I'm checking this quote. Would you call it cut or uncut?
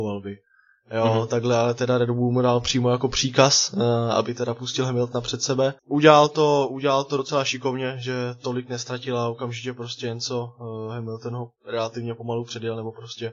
cut